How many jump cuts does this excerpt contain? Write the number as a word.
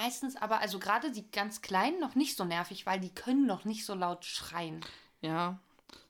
zero